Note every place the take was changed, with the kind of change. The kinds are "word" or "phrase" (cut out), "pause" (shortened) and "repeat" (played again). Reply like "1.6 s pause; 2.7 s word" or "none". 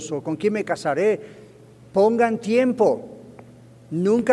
none